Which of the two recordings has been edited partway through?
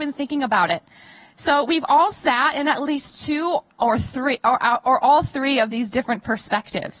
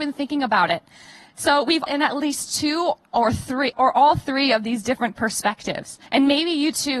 second; 3 cuts; at 1.9 s, 3.7 s, 6.1 s

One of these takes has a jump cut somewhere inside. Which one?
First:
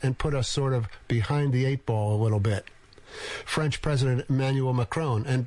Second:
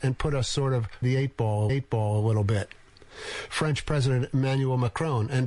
second; 2 cuts; at 1.0 s, 1.7 s

